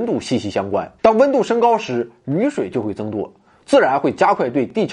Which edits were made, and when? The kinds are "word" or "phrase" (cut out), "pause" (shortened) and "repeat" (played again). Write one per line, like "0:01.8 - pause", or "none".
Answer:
0:01.0 - pause